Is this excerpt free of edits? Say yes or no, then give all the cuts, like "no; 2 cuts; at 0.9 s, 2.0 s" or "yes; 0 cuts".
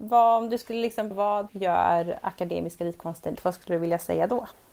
no; 3 cuts; at 1.1 s, 1.5 s, 3.4 s